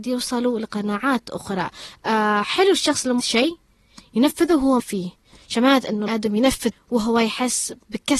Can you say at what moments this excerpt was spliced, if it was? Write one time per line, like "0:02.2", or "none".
0:03.2
0:04.8
0:06.1
0:06.7